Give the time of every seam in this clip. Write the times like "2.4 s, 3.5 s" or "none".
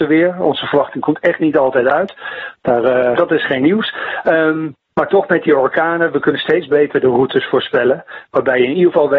3.1 s